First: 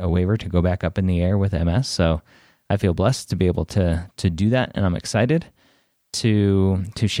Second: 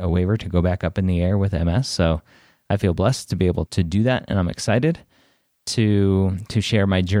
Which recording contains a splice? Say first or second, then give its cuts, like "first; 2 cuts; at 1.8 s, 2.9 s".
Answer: second; 1 cut; at 3.7 s